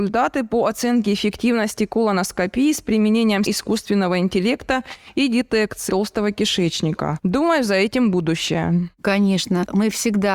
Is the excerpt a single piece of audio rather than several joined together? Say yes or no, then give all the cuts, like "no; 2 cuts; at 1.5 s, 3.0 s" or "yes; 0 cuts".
no; 2 cuts; at 3.5 s, 5.9 s